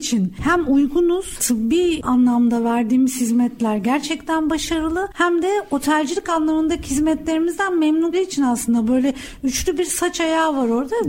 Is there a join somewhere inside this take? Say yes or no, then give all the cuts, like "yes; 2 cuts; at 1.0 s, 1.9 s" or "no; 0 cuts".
yes; 2 cuts; at 1.4 s, 8.1 s